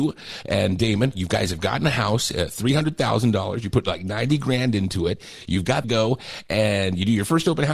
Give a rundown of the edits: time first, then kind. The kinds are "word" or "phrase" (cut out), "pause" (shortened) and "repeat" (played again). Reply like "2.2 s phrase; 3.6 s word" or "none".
5.8 s phrase